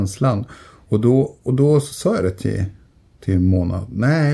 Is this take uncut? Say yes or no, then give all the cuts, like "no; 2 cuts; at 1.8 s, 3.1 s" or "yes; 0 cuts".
yes; 0 cuts